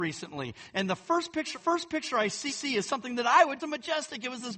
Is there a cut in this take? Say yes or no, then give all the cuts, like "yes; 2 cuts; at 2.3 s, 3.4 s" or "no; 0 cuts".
yes; 3 cuts; at 1.5 s, 2.5 s, 3.6 s